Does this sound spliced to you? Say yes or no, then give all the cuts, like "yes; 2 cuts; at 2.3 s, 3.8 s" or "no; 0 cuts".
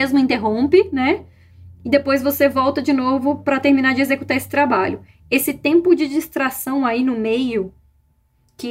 no; 0 cuts